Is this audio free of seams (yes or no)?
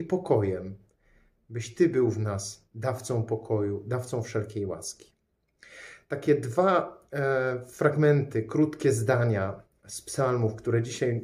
yes